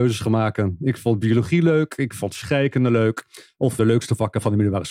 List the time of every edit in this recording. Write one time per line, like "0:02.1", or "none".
0:03.8